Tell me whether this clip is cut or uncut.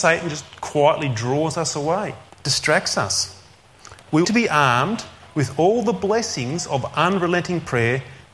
cut